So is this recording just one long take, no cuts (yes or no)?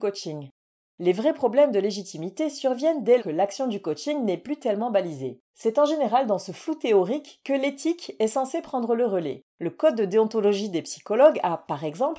no